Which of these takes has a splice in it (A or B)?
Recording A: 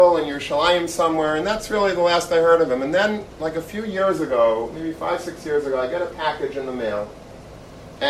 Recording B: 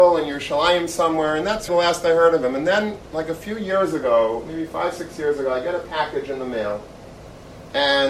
B